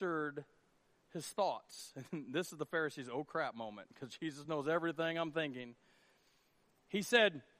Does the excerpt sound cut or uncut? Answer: uncut